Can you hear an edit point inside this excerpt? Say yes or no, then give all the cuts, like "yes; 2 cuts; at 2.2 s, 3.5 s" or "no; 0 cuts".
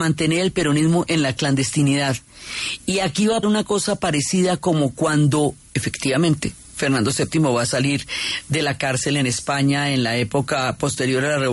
yes; 1 cut; at 3.4 s